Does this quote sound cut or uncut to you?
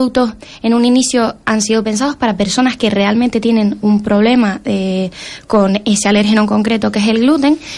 uncut